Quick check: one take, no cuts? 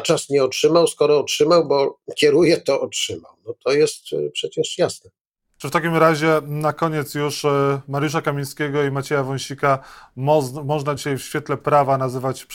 yes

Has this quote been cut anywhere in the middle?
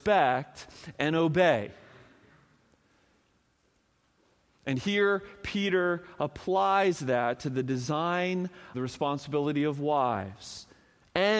yes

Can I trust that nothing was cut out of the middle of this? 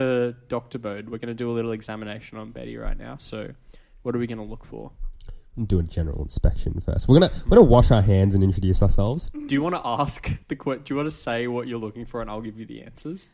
yes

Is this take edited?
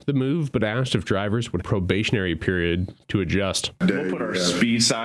yes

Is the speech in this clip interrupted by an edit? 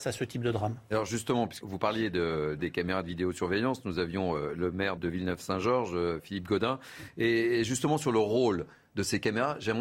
yes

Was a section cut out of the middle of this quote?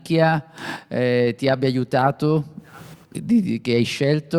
no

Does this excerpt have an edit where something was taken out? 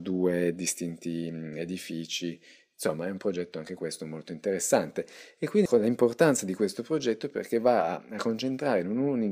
no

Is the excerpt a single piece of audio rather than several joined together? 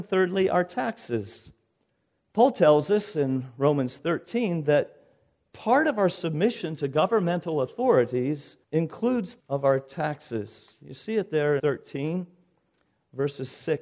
no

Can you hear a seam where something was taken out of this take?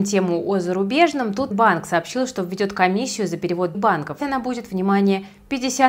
yes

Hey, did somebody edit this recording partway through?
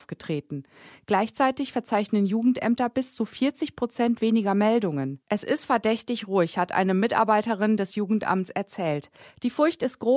no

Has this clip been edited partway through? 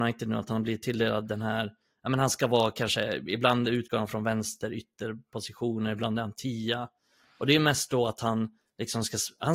no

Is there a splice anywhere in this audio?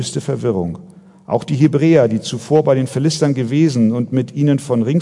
no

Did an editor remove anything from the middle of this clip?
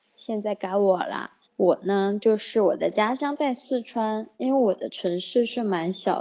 yes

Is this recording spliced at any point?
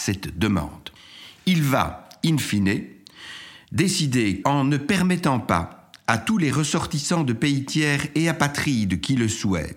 yes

